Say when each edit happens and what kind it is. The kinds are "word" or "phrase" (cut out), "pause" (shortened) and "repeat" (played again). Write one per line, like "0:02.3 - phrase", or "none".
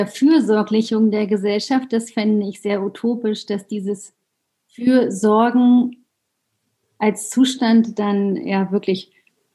none